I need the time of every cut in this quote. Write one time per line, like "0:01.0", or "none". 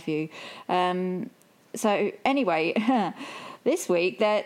none